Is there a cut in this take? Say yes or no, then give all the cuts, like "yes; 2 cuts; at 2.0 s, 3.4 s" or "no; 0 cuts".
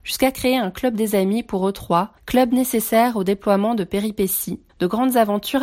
yes; 2 cuts; at 2.2 s, 4.7 s